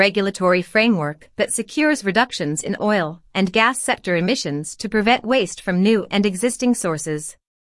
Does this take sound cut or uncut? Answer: uncut